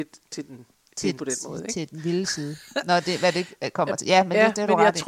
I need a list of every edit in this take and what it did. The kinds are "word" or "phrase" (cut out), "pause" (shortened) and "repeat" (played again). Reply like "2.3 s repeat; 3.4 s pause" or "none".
1.2 s word